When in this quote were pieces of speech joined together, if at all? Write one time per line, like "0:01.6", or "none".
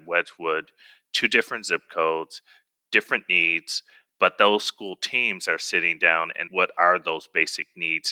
0:06.5